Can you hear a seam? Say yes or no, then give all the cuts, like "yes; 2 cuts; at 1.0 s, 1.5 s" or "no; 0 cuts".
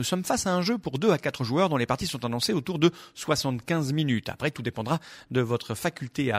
no; 0 cuts